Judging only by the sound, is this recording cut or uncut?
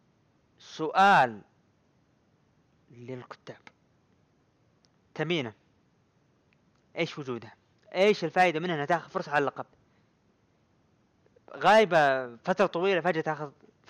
uncut